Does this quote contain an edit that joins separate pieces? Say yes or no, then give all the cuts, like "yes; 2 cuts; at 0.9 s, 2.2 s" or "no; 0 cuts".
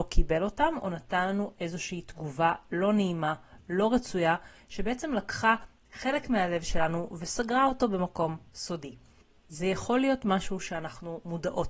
no; 0 cuts